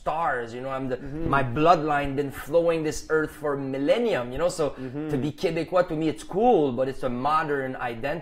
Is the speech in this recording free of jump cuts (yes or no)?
yes